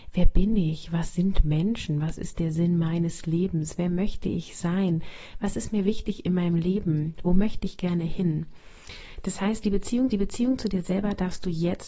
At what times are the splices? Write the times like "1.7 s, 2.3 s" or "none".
10.1 s